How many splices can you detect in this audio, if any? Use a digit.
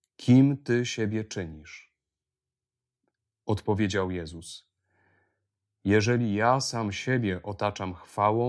0